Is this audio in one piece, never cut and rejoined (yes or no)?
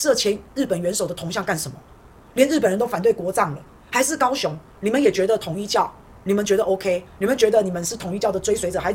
yes